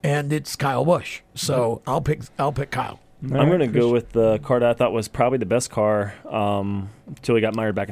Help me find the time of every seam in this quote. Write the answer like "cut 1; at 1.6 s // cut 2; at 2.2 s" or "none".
none